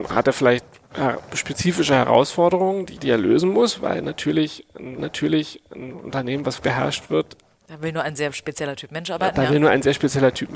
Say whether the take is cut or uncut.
cut